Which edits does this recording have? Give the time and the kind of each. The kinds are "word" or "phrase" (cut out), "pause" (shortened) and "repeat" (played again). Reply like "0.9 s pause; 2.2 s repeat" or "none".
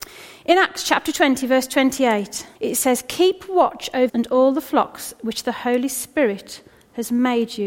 2.6 s pause; 4.1 s word